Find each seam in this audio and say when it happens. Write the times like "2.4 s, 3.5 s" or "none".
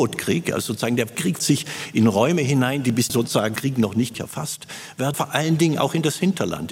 1.4 s, 3.1 s, 3.6 s, 4.1 s, 5.1 s